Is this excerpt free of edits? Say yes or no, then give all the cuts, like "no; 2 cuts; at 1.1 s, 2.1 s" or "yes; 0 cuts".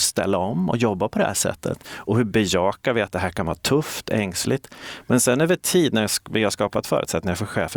yes; 0 cuts